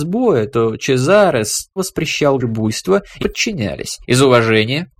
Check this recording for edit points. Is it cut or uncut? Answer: cut